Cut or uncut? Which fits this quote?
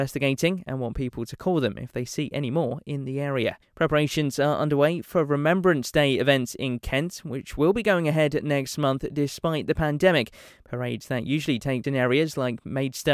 cut